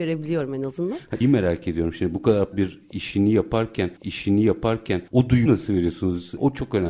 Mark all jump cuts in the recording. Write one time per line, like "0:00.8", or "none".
0:01.2
0:02.5
0:04.0
0:05.5

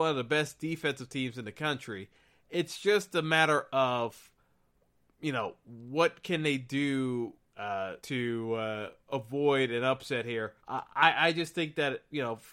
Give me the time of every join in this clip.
0:08.0
0:09.0
0:10.6

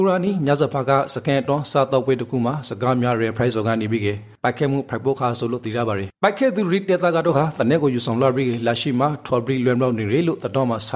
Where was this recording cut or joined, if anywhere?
0:06.1

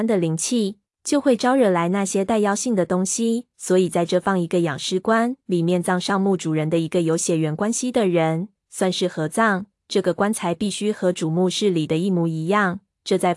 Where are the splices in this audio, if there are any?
0:03.5
0:05.4

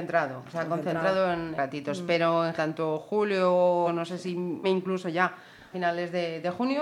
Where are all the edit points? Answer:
0:01.6
0:02.6
0:03.9
0:04.6
0:05.7

